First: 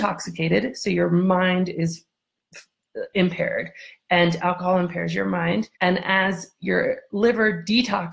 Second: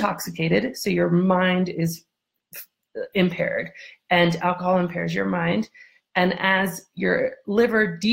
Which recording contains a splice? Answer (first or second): first